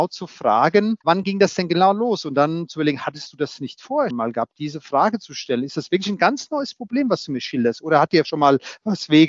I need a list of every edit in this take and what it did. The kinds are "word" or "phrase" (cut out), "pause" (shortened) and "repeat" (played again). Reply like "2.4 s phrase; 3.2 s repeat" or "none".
1.0 s pause; 4.1 s word; 8.2 s word